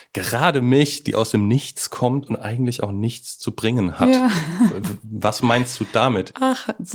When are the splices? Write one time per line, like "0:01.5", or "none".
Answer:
none